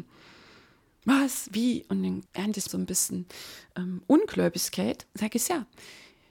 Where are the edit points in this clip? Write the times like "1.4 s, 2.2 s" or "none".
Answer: 2.3 s, 2.7 s